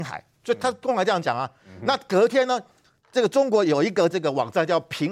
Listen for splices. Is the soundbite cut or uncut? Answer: uncut